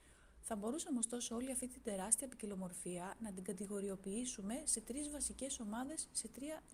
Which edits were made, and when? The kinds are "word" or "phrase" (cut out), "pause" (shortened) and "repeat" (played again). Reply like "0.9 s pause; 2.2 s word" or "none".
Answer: none